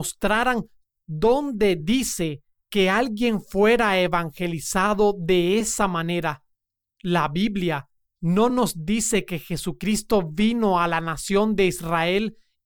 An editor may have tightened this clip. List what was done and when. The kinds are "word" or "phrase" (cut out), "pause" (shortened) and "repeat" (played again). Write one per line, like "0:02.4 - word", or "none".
none